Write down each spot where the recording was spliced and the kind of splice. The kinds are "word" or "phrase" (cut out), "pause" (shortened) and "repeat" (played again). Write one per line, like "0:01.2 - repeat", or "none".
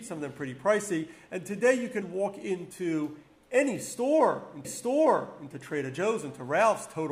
0:02.0 - word
0:04.6 - repeat